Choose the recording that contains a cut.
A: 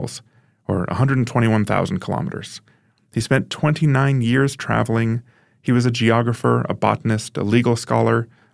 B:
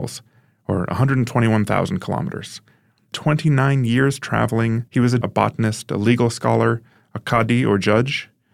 B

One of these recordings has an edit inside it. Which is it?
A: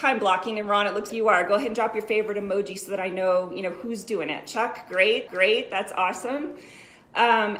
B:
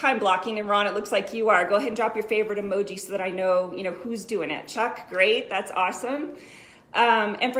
A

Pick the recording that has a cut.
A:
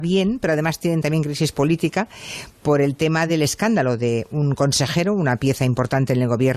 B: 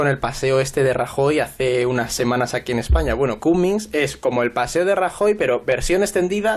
B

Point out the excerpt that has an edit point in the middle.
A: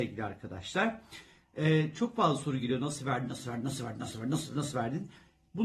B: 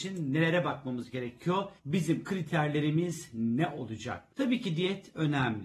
B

